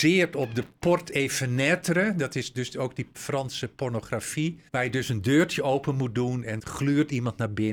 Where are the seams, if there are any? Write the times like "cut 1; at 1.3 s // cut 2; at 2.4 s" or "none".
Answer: cut 1; at 3.1 s // cut 2; at 4.7 s // cut 3; at 6.6 s